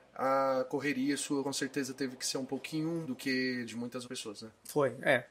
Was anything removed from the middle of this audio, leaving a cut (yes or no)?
yes